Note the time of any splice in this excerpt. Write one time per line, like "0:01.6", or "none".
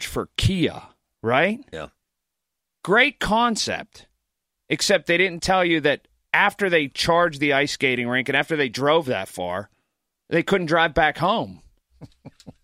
none